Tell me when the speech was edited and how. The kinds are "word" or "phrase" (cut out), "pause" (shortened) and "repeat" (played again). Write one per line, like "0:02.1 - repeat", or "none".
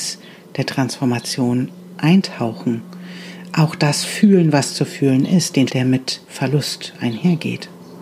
0:05.7 - word

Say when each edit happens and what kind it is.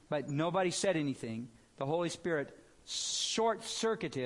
none

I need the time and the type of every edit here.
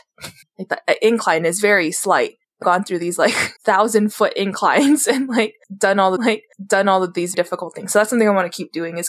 0:02.6 - phrase
0:03.6 - pause
0:06.2 - repeat
0:07.3 - word

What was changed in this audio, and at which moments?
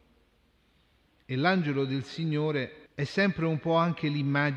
0:02.9 - pause

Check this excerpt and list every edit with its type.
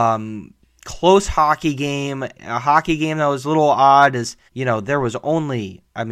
0:02.3 - word
0:04.5 - pause

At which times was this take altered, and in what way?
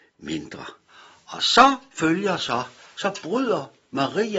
none

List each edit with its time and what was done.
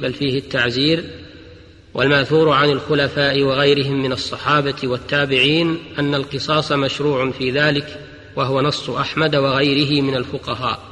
none

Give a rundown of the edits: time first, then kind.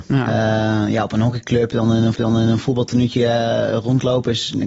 0:02.1 - repeat

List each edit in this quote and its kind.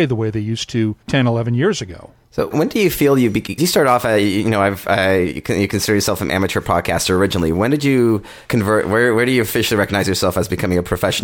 0:01.0 - pause
0:02.5 - word
0:03.6 - word
0:08.4 - pause

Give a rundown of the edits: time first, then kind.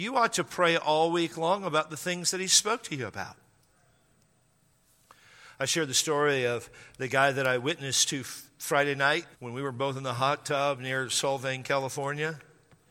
0:09.3 - pause

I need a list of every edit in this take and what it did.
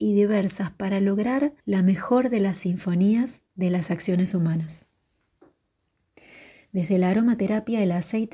0:01.6 - pause
0:03.5 - pause

